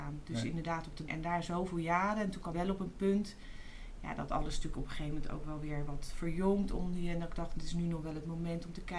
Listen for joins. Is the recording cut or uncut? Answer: cut